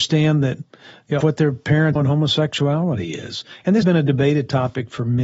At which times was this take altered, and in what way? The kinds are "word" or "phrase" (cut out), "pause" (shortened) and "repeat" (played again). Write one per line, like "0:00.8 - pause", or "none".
0:01.2 - word
0:02.0 - word
0:03.8 - word